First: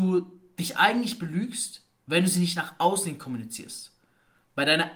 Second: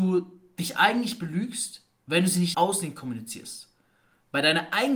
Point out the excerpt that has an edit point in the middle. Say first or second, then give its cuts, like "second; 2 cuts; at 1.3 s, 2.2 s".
second; 1 cut; at 2.5 s